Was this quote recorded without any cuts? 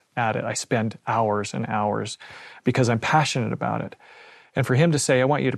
yes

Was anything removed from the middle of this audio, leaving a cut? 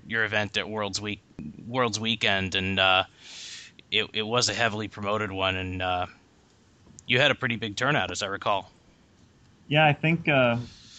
no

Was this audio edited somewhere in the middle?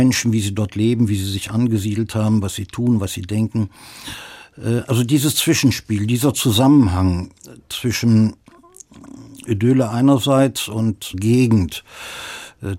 yes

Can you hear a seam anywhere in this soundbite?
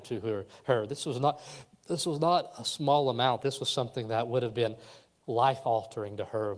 no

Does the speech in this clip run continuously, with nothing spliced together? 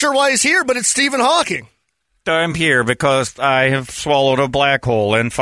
yes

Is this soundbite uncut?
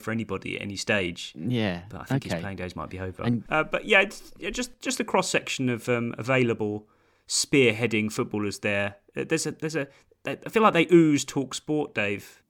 yes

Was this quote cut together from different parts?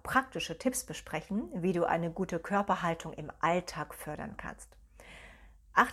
no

